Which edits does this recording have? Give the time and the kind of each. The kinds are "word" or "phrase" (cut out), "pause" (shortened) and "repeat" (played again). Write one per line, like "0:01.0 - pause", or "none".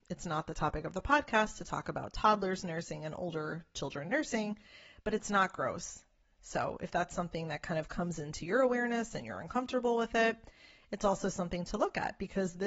none